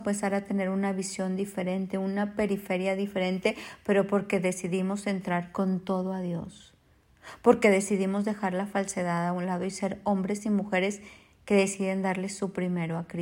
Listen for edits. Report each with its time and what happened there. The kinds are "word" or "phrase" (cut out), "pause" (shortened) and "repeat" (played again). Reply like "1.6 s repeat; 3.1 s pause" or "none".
none